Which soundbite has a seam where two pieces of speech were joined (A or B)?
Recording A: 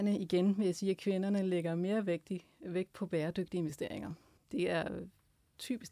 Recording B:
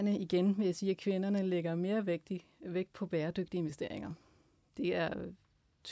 A